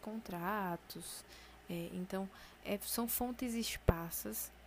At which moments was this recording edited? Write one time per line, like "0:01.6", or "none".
0:02.6